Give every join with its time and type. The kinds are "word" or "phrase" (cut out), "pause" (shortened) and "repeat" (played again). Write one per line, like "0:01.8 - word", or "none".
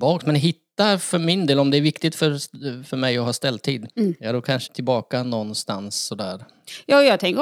0:03.9 - pause
0:04.7 - phrase